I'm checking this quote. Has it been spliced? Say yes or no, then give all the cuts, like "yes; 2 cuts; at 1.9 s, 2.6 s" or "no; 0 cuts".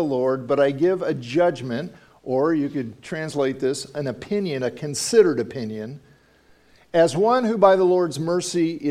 no; 0 cuts